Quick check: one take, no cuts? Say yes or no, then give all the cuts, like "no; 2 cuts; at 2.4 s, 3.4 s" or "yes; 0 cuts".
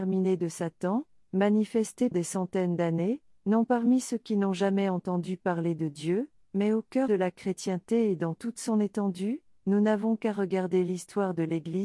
no; 2 cuts; at 2.1 s, 7.1 s